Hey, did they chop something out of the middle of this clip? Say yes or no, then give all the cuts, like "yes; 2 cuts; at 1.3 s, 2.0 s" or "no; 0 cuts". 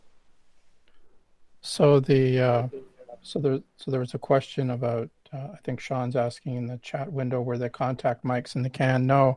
no; 0 cuts